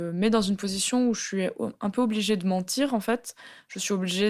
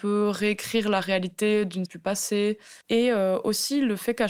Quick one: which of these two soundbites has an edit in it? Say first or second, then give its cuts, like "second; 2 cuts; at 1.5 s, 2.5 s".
second; 2 cuts; at 1.9 s, 2.8 s